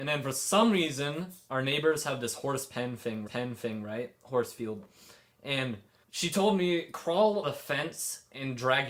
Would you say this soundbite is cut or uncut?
cut